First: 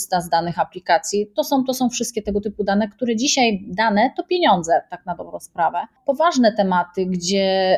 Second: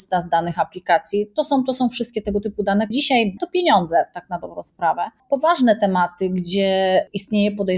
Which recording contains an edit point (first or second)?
second